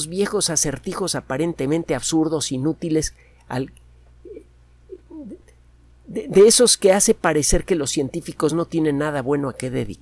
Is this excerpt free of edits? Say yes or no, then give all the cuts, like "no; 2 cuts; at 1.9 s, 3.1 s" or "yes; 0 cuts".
yes; 0 cuts